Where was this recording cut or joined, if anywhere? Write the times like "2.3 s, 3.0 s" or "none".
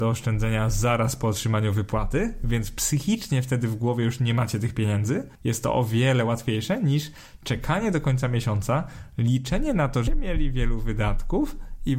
5.4 s, 10.1 s